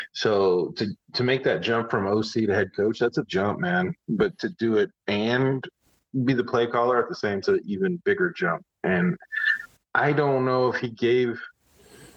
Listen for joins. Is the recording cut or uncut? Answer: cut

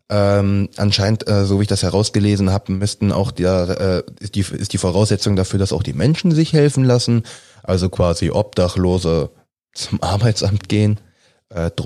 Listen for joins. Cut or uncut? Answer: uncut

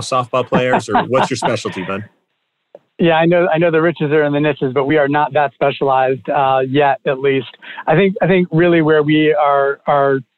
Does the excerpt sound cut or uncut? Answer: uncut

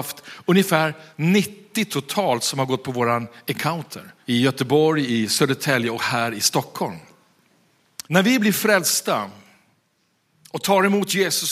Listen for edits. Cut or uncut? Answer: cut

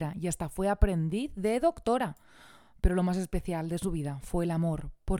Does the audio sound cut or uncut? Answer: uncut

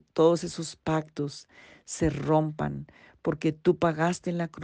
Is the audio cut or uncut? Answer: uncut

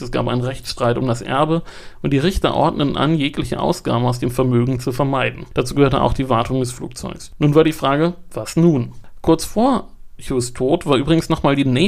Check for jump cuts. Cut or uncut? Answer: uncut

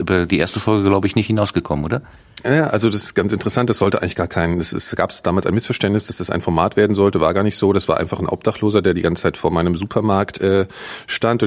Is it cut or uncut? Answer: uncut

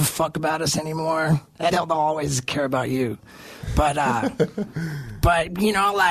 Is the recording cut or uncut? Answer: cut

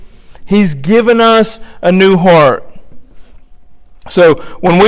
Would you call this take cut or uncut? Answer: uncut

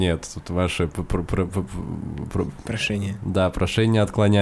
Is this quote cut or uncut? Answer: uncut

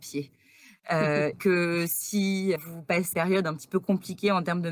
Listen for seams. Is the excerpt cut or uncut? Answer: cut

